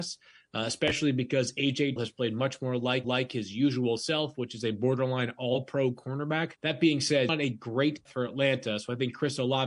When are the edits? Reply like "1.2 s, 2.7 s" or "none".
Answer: 2.0 s, 3.0 s, 6.6 s, 7.3 s, 8.1 s